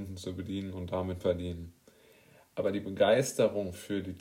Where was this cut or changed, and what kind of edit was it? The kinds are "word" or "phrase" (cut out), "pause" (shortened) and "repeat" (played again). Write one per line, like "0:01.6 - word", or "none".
0:01.2 - phrase